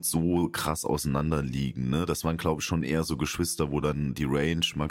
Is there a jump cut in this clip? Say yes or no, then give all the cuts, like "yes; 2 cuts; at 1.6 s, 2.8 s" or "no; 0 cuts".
no; 0 cuts